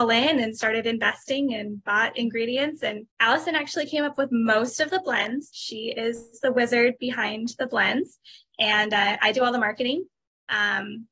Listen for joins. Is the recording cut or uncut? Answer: cut